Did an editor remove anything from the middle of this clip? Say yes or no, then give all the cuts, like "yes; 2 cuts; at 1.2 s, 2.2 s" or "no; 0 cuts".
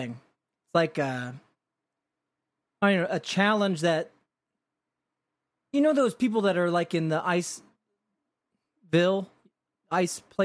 no; 0 cuts